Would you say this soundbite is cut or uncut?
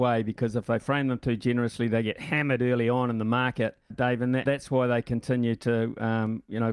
cut